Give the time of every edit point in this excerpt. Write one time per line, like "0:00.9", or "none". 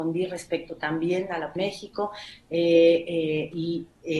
0:01.6